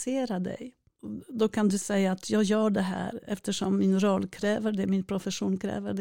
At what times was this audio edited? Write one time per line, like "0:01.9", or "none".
none